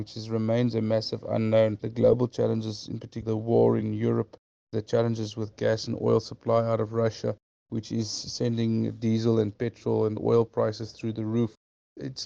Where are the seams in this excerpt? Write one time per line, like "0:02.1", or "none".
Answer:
none

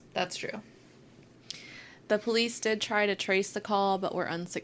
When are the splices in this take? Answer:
none

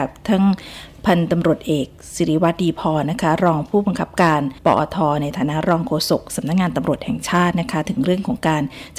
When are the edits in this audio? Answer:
0:04.6

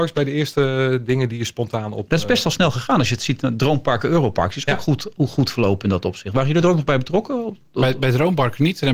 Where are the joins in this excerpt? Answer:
none

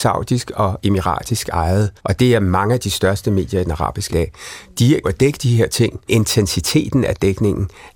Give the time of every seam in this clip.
0:02.0
0:04.1
0:05.0
0:06.1

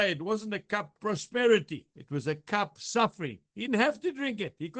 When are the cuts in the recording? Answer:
0:01.0
0:02.8
0:03.7

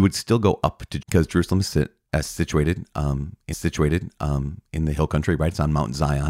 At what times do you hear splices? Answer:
0:01.0
0:03.5

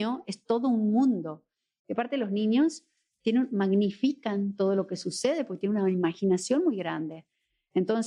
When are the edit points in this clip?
none

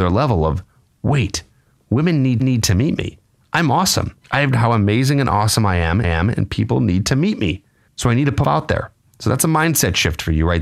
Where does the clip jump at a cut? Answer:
0:02.4
0:04.2
0:04.5
0:06.0
0:07.9
0:08.4

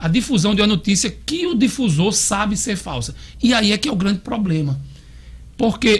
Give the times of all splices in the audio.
none

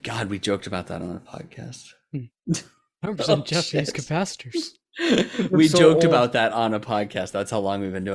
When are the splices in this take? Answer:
none

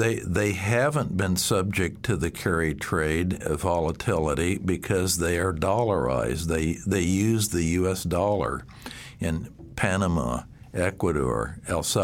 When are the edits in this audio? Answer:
none

